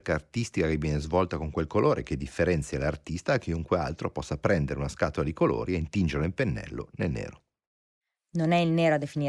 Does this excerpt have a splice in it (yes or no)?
no